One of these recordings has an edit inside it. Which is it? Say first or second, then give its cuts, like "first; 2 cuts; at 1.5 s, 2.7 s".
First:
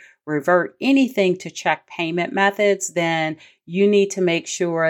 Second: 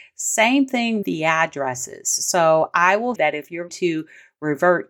second; 3 cuts; at 1.0 s, 3.2 s, 3.7 s